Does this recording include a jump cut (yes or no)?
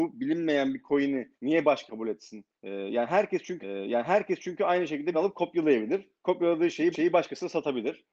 yes